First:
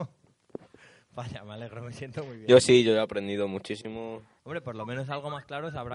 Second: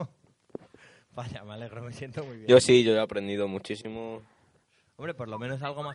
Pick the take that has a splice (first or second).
first